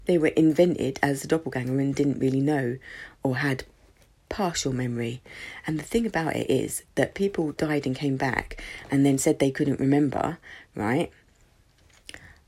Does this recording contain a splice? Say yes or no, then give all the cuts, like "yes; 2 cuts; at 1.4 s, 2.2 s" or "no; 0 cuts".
no; 0 cuts